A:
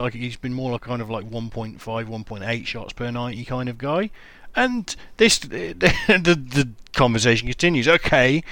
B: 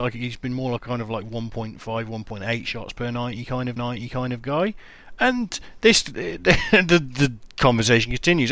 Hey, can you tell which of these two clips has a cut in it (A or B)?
B